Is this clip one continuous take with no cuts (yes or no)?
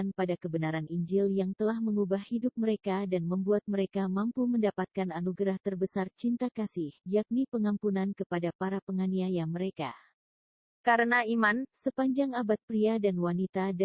yes